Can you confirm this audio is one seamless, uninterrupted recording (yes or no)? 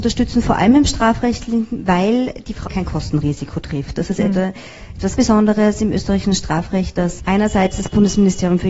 no